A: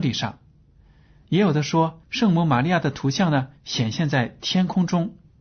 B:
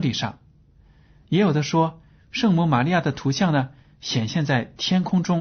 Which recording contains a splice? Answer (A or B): A